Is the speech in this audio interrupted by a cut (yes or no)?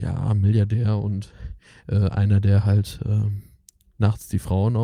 no